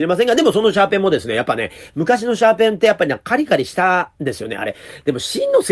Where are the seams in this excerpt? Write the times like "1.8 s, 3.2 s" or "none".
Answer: 4.2 s